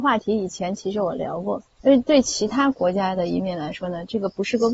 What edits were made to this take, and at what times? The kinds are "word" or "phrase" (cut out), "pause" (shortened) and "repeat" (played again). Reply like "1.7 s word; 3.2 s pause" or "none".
1.7 s pause